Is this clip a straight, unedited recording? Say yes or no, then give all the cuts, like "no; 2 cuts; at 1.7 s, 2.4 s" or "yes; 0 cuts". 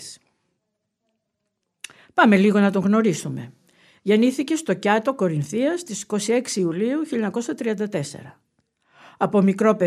yes; 0 cuts